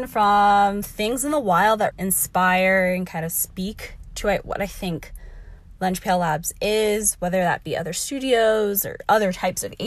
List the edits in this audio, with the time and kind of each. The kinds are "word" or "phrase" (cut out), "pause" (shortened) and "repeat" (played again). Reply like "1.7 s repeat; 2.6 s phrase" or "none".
1.9 s word